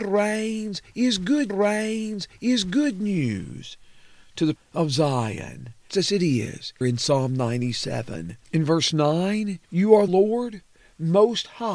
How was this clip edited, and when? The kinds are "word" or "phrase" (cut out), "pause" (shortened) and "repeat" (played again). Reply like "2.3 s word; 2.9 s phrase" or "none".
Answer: 1.5 s repeat; 4.6 s word; 5.9 s word; 6.8 s word; 8.4 s pause; 9.6 s pause; 10.1 s word

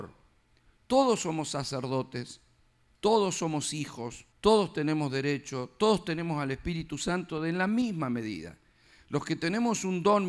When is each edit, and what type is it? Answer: 4.3 s pause

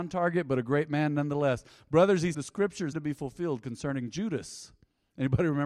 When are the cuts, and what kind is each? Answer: 2.3 s word; 2.9 s word

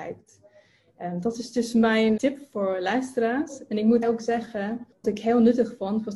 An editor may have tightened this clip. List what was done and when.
2.2 s word; 4.0 s word; 5.0 s word

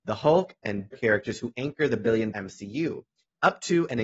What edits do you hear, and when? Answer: 0.9 s phrase; 2.3 s word

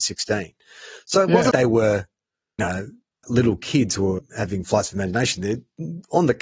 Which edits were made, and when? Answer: 1.5 s word; 2.6 s word; 3.2 s word; 4.2 s word

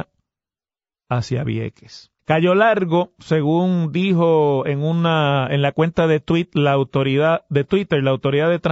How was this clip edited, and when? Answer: 2.2 s pause

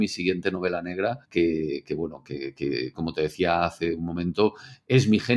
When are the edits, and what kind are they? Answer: 1.2 s pause

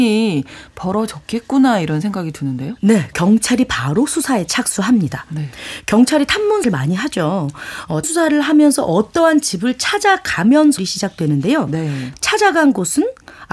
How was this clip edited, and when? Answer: 3.1 s word; 6.6 s word; 8.0 s word; 10.8 s word

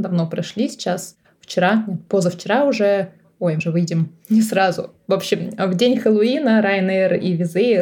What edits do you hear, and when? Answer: 3.6 s word

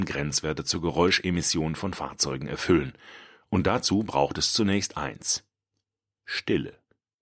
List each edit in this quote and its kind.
none

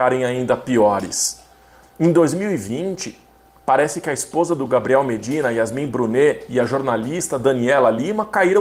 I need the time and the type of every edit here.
none

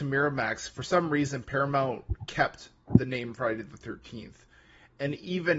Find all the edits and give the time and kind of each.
none

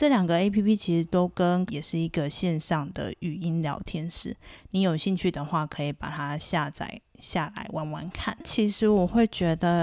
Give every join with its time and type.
1.7 s phrase

